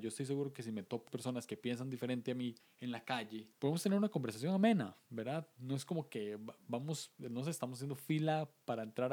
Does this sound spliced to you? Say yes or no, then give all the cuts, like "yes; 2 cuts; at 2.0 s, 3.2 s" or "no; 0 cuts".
yes; 3 cuts; at 1.1 s, 2.6 s, 3.5 s